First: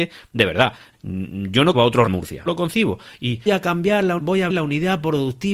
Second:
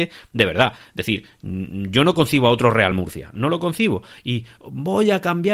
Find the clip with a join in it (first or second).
first